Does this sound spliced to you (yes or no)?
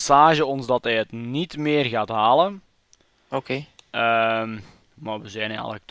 no